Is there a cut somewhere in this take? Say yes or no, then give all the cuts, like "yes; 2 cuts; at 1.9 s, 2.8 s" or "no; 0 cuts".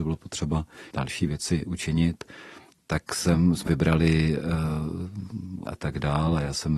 yes; 3 cuts; at 0.9 s, 3.7 s, 5.7 s